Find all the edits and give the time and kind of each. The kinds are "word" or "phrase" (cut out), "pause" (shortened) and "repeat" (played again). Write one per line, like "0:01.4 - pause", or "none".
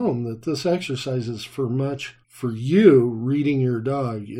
0:02.2 - pause